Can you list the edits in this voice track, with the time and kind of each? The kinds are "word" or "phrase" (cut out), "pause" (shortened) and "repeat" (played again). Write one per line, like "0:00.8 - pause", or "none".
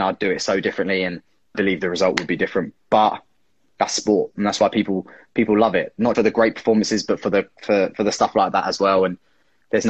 0:01.5 - word
0:06.1 - word